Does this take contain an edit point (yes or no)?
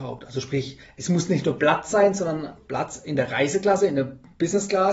yes